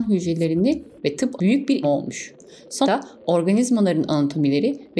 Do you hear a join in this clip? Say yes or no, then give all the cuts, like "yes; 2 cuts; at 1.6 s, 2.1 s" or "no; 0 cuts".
yes; 4 cuts; at 1.0 s, 1.4 s, 1.8 s, 2.8 s